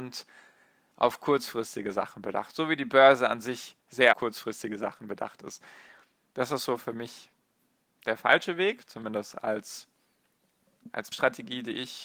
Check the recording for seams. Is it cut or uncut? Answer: cut